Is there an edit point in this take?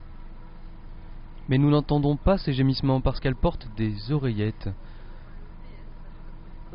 no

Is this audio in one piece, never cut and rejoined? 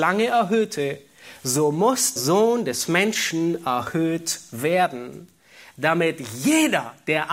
no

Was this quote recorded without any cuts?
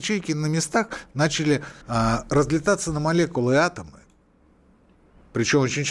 no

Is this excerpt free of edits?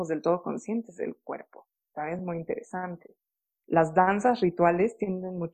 yes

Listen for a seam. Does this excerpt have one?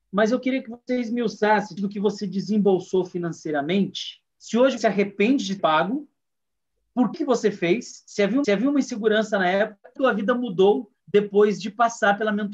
yes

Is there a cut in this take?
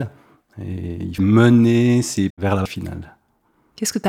yes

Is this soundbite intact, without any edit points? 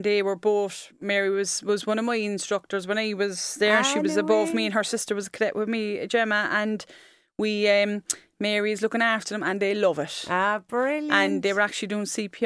yes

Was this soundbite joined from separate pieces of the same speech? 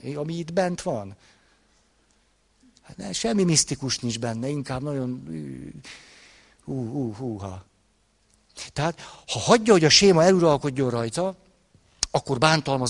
no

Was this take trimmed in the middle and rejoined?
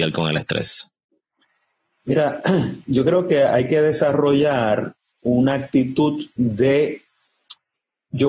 no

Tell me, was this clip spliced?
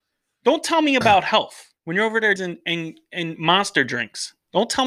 yes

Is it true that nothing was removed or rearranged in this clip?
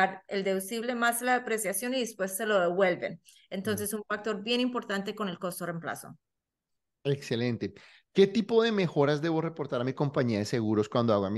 yes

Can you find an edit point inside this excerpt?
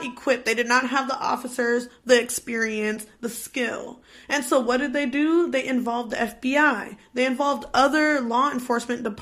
no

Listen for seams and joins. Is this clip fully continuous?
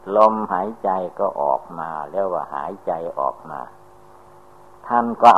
yes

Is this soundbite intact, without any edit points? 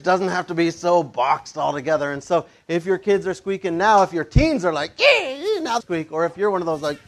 no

